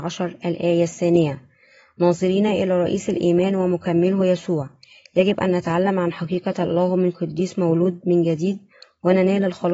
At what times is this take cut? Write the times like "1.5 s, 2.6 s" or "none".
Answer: none